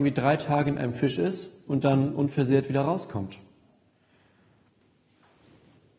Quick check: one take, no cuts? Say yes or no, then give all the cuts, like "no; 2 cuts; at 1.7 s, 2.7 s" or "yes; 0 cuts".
yes; 0 cuts